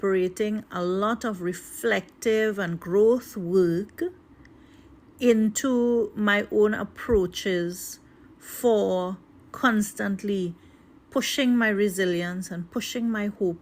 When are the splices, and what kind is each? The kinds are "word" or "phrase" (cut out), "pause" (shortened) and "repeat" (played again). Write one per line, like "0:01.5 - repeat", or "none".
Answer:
none